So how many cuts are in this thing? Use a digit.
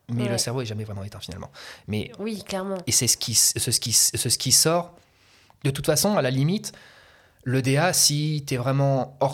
1